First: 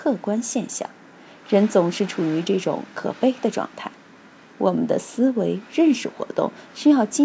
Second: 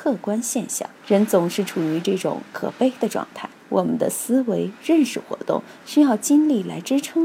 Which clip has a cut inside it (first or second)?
second